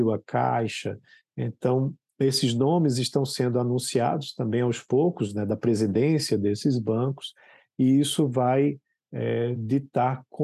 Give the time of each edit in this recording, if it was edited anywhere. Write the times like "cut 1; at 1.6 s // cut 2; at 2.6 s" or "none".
none